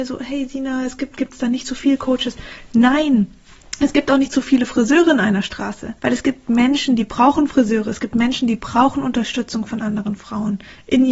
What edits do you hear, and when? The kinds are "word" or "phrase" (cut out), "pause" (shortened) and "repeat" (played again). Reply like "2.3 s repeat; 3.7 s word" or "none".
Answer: 6.0 s pause